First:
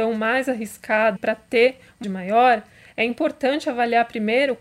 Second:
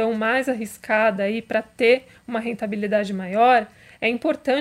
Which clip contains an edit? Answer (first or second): first